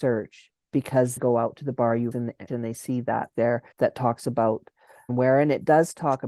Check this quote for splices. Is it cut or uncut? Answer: cut